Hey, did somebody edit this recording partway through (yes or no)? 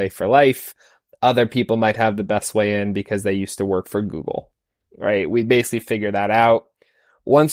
no